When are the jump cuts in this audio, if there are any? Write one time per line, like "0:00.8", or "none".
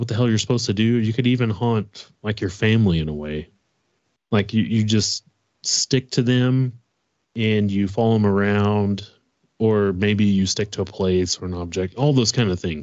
none